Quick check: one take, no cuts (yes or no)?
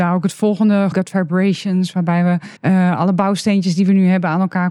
no